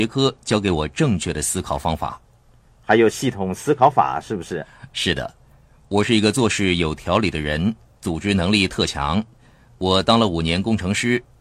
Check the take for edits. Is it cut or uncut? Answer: uncut